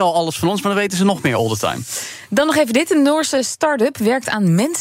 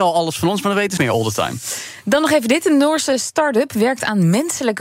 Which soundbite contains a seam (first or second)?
second